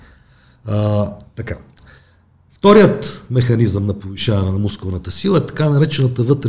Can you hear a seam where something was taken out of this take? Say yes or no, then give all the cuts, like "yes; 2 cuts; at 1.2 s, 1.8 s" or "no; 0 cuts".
no; 0 cuts